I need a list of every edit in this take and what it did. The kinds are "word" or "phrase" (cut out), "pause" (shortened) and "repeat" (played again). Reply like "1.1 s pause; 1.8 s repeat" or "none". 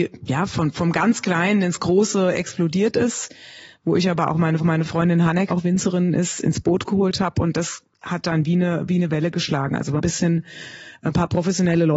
4.6 s repeat; 5.5 s word; 10.0 s word